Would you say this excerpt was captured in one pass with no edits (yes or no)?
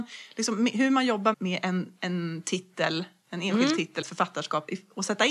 no